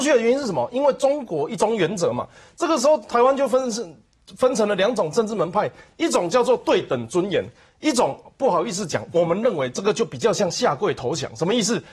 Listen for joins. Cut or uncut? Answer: uncut